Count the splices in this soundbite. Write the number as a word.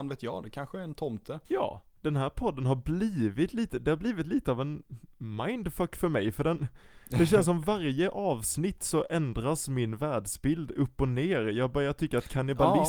two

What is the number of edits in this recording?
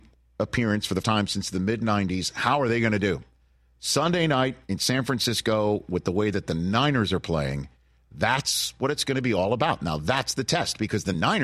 one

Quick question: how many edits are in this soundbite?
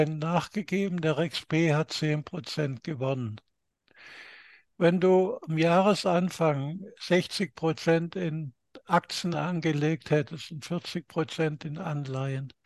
zero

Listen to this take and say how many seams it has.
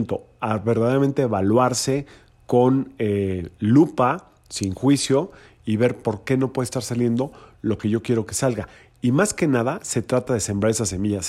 zero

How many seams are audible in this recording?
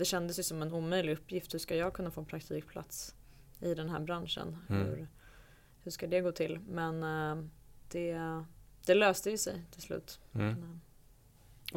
zero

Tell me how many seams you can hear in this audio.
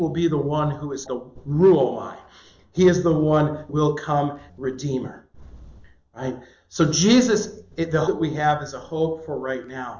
four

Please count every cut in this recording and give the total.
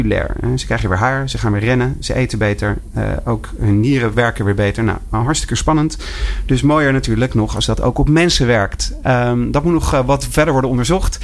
zero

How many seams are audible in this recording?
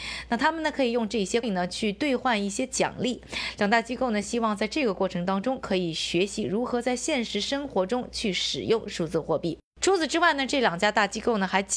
one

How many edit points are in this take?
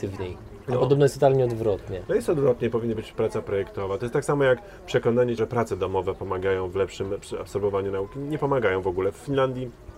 two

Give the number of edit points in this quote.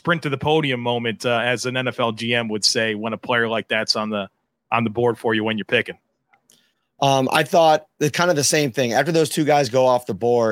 zero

